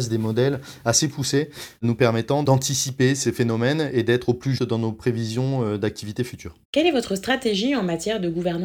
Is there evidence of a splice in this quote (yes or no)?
yes